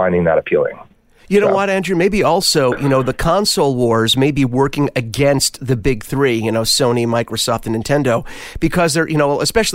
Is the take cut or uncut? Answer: uncut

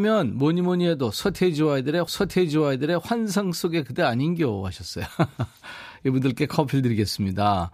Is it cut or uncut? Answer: cut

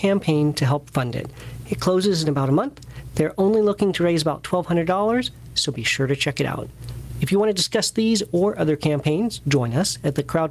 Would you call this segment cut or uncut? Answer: uncut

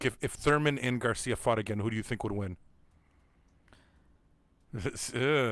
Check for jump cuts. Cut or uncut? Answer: uncut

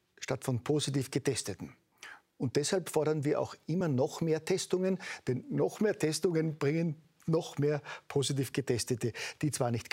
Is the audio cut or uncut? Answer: uncut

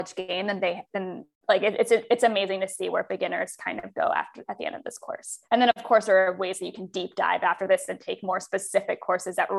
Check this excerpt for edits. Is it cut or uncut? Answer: cut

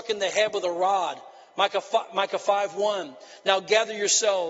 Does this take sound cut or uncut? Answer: uncut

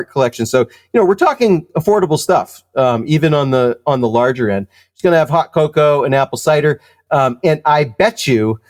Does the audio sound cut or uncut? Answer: uncut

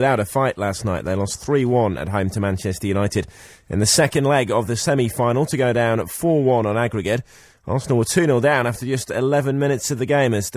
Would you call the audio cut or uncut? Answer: uncut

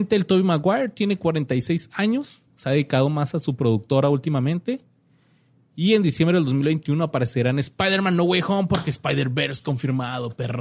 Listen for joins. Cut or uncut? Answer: uncut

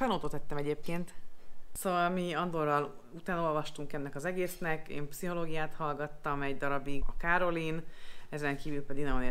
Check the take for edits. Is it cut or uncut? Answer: cut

